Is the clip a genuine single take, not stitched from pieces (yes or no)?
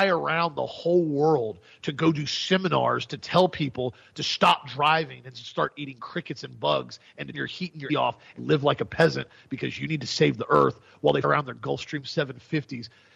no